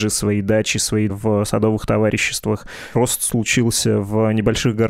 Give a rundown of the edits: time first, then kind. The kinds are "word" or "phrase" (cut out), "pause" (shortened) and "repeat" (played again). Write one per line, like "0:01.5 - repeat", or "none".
0:01.1 - word
0:02.9 - word